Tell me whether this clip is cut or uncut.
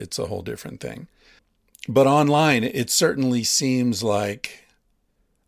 cut